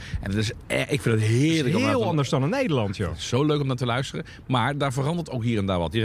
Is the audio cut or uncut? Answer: uncut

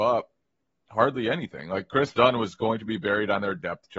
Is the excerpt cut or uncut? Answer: uncut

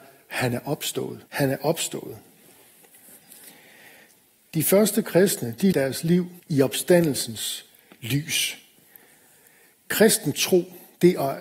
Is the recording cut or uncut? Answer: cut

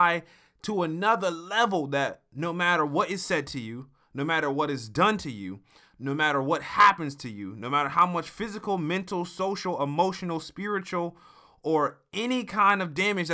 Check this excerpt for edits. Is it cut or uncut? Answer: uncut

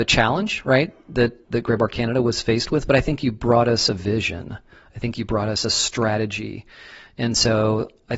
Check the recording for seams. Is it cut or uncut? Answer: cut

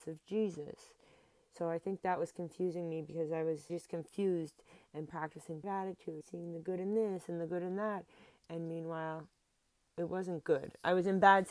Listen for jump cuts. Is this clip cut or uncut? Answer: cut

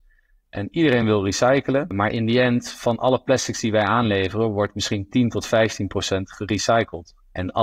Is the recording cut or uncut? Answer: uncut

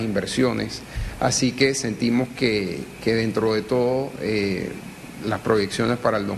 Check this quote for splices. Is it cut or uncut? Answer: uncut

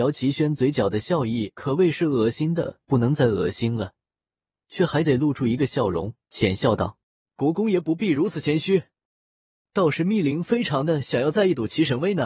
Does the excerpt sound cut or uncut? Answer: cut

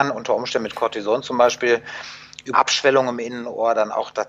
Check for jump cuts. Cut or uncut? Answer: cut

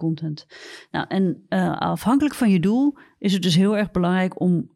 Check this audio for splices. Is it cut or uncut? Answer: uncut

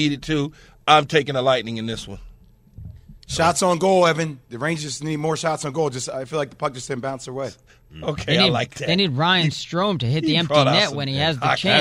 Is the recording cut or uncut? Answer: cut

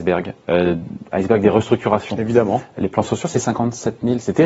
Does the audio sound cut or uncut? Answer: uncut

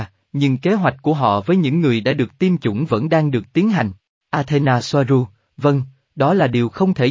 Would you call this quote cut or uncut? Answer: uncut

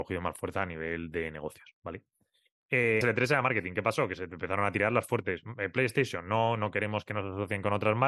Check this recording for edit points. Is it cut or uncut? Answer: cut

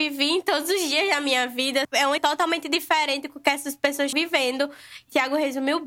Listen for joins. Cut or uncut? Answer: cut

